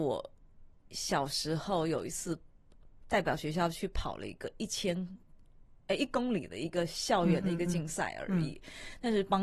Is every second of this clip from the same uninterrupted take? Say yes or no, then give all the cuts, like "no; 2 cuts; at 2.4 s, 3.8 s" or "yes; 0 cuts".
yes; 0 cuts